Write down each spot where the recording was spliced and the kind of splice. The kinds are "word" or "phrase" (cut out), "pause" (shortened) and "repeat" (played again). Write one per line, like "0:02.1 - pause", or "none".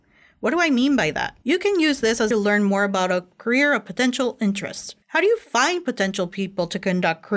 0:01.4 - pause
0:02.3 - phrase
0:05.0 - pause

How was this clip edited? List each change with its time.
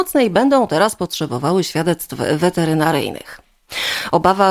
none

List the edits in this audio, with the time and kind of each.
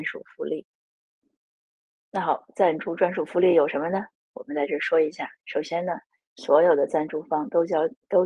0:05.4 - pause

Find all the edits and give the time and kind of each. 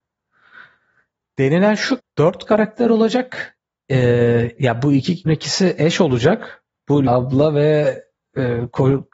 0:02.0 - word
0:04.6 - word
0:05.3 - word
0:07.1 - word

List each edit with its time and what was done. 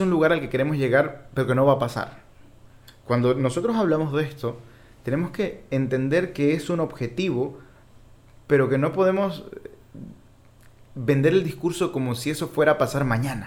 none

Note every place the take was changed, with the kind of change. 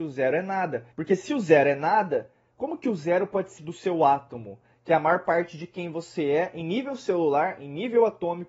0:00.9 - pause
0:03.6 - phrase

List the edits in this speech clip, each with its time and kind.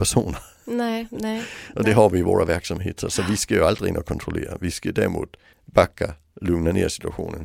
0:05.5 - pause

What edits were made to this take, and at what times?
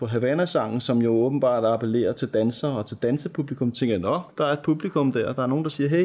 0:04.3 - word

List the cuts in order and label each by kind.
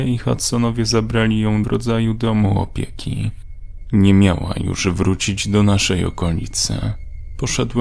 0:01.6 - phrase

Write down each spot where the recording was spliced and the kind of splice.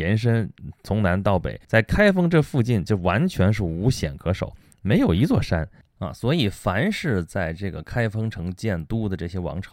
0:01.6 - pause

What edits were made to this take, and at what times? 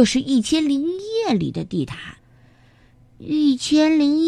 0:02.2 - pause

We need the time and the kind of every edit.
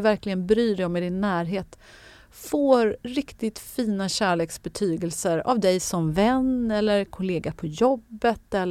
0:03.0 - pause

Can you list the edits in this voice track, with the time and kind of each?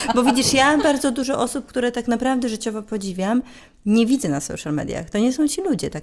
none

